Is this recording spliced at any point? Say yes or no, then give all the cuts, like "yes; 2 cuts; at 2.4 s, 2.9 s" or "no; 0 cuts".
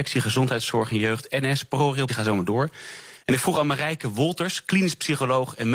yes; 1 cut; at 2.1 s